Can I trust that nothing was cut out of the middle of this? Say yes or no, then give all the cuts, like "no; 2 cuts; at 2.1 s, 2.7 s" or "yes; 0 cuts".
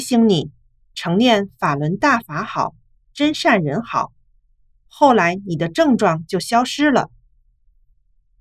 yes; 0 cuts